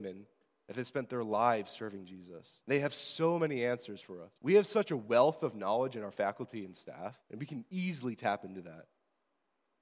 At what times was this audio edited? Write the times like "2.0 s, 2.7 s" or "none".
2.6 s, 4.4 s, 7.2 s